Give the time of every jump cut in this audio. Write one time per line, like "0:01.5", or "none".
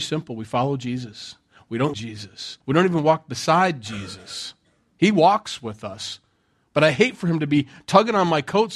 0:01.9
0:02.6